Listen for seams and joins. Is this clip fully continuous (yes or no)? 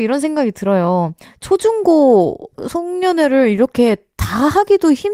yes